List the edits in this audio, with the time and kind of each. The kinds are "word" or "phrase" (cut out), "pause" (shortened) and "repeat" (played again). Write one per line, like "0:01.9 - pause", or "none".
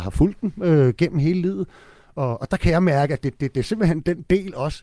none